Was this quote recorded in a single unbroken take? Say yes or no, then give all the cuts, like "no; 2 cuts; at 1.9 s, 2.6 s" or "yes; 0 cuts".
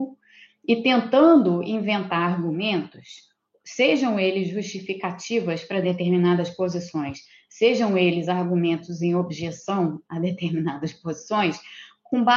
yes; 0 cuts